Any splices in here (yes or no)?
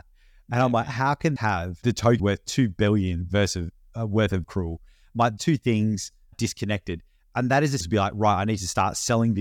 yes